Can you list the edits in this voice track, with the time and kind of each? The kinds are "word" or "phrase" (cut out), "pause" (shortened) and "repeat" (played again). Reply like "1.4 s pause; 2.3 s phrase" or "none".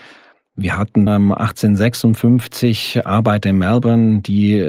1.1 s word